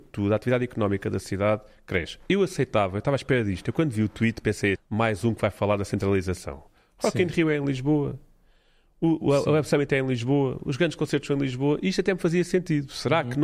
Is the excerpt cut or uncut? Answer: cut